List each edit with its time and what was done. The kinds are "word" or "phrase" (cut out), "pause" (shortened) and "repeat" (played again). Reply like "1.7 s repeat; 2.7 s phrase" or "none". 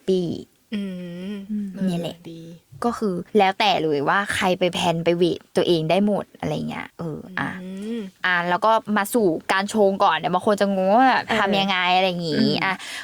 6.9 s pause

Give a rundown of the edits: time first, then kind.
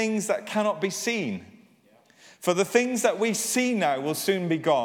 none

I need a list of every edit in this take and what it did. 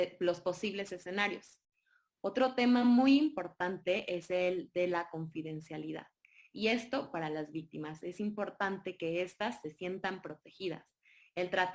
none

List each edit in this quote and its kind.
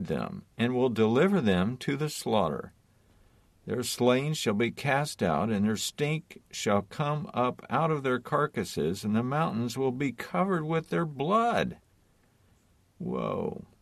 none

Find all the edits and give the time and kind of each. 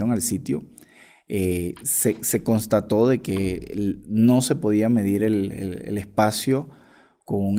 none

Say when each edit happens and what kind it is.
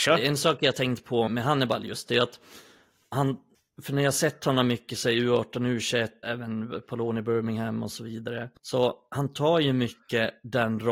1.3 s word; 3.5 s pause; 6.2 s word; 8.6 s pause

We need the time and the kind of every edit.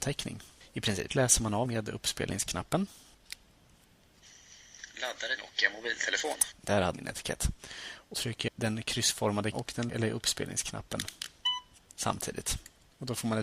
1.1 s word; 1.7 s word; 5.4 s word; 6.9 s word; 8.1 s word; 8.5 s word; 9.5 s word; 9.9 s word

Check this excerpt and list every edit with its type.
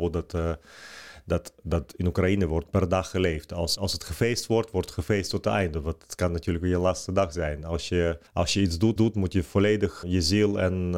3.8 s word; 8.3 s pause; 9.0 s repeat; 10.0 s word

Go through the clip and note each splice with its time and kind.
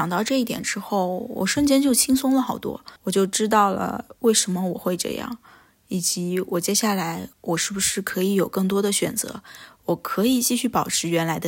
3.0 s pause; 7.3 s pause

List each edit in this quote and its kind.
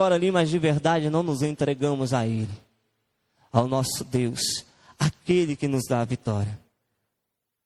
none

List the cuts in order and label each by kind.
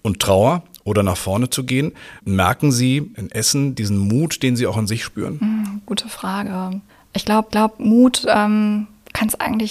2.2 s pause; 6.9 s pause; 7.5 s repeat

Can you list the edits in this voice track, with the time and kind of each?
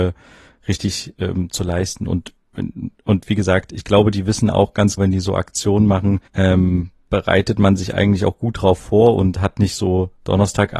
5.0 s word; 6.3 s pause

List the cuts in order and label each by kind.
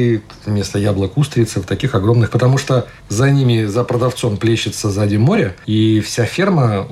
2.3 s word; 3.0 s pause

